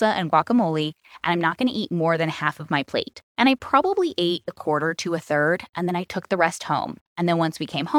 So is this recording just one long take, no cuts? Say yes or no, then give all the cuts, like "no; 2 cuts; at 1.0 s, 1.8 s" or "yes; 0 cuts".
no; 2 cuts; at 3.3 s, 7.1 s